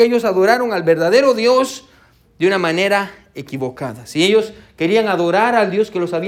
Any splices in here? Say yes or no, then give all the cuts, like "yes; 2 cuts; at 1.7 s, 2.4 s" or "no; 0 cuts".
no; 0 cuts